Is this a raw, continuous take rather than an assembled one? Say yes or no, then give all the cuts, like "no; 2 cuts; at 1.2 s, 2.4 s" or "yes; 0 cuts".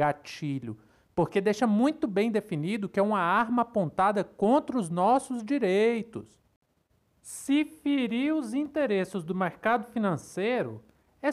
yes; 0 cuts